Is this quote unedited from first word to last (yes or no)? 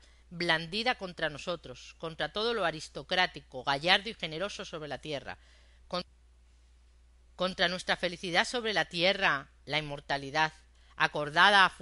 yes